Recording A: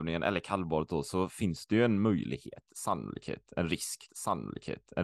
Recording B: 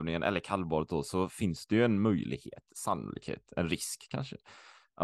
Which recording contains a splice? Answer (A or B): A